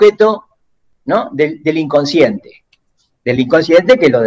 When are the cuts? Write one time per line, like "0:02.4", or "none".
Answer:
none